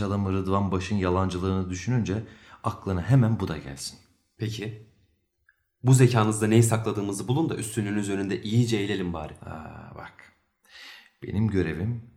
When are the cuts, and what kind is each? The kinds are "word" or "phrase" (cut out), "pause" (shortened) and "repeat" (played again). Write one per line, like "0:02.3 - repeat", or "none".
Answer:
none